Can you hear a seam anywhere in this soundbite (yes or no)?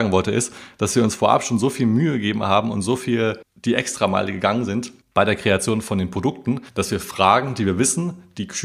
yes